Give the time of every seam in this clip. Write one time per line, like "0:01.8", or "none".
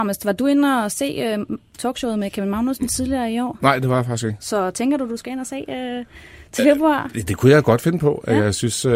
none

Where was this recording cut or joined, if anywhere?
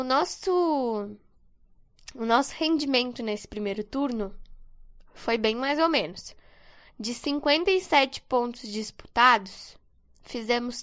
none

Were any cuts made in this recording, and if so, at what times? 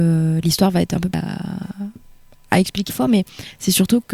0:01.1
0:02.9

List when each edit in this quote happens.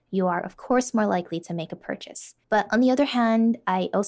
0:02.4

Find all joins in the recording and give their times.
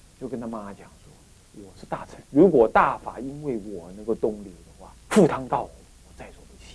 0:02.2
0:05.0

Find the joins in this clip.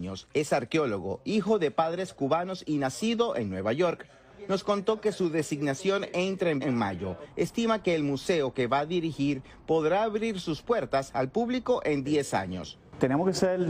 0:06.6

